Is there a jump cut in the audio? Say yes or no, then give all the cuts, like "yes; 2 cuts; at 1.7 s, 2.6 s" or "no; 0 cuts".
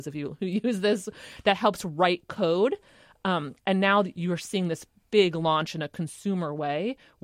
no; 0 cuts